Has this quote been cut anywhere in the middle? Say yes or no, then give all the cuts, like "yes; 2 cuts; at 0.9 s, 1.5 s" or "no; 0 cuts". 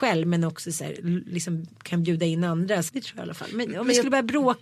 yes; 1 cut; at 2.9 s